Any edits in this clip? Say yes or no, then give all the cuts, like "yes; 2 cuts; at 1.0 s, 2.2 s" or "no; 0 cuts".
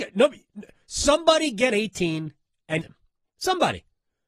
yes; 2 cuts; at 1.7 s, 2.8 s